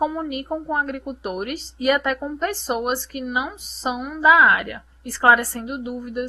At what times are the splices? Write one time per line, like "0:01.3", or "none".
0:04.9